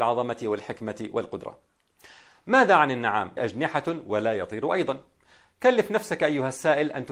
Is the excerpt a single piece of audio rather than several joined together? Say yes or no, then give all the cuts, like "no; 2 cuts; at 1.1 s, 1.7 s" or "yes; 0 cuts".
no; 1 cut; at 3.4 s